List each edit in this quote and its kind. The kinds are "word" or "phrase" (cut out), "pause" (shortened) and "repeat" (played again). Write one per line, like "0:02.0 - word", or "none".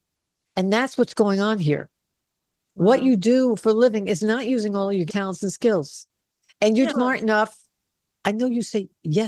0:05.1 - word
0:06.2 - pause
0:06.9 - word